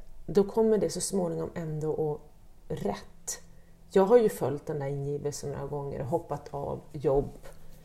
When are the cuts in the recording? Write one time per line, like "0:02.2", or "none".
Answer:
0:02.6